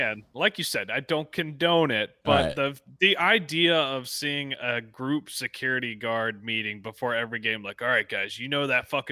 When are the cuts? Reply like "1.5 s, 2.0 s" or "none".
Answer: none